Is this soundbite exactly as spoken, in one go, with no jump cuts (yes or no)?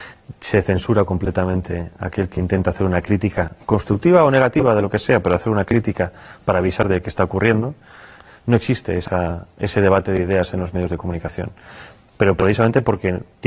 yes